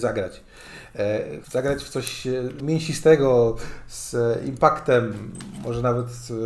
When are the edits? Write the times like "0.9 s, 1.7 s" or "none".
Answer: 1.4 s, 2.6 s